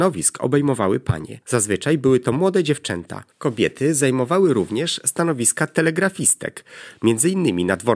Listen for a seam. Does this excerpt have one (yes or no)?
yes